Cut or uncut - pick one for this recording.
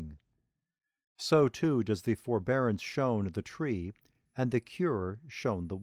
uncut